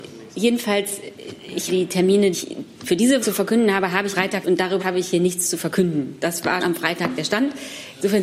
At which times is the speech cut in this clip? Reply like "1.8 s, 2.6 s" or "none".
1.7 s, 2.3 s, 3.2 s, 4.1 s, 4.4 s, 4.8 s, 6.6 s